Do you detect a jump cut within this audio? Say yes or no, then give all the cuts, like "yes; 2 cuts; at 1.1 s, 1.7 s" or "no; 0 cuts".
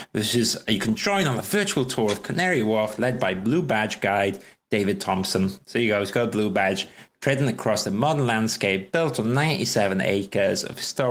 no; 0 cuts